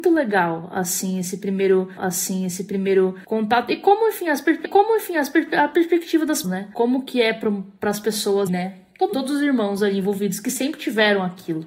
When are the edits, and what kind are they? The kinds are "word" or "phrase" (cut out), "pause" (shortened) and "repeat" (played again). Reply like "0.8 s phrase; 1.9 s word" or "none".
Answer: 2.0 s repeat; 4.6 s repeat; 6.4 s word; 8.5 s word; 9.1 s word